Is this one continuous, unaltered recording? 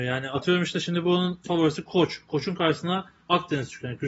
yes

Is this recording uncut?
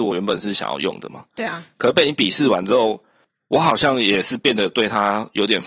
yes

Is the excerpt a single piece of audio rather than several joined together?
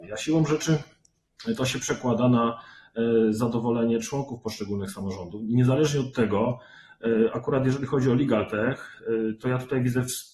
yes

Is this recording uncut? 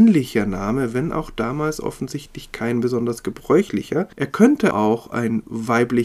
no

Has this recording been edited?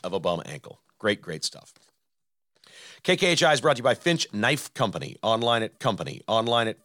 yes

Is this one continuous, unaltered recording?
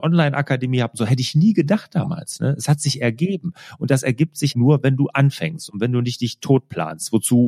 no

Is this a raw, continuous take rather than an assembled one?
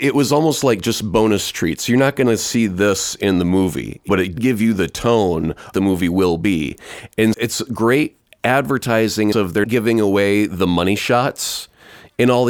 no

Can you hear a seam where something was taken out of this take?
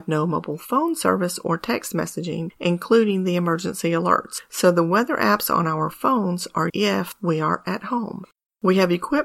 yes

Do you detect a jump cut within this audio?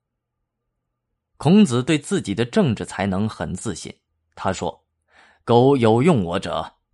no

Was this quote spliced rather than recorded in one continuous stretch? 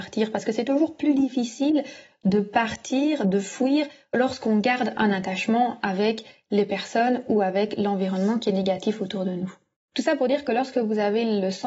no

